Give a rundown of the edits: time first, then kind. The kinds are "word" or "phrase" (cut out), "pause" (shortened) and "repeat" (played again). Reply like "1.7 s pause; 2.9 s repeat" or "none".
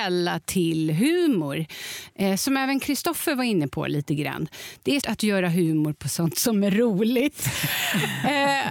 5.0 s word